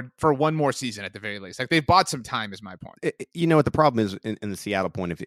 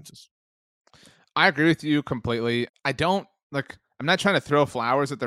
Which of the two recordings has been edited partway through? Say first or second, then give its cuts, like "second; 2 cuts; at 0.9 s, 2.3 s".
second; 1 cut; at 2.7 s